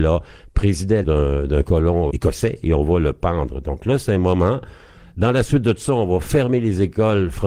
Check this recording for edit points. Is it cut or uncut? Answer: cut